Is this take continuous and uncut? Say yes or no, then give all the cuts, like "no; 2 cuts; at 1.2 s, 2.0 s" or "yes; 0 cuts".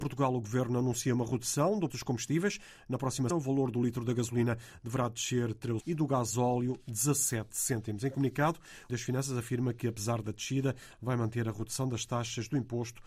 no; 4 cuts; at 1.9 s, 3.3 s, 5.8 s, 8.9 s